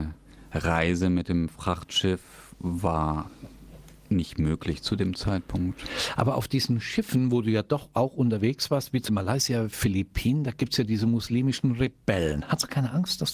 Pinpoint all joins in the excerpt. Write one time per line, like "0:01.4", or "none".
0:09.1